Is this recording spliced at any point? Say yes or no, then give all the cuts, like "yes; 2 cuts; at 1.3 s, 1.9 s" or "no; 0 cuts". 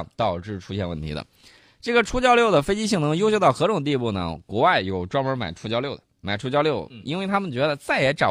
no; 0 cuts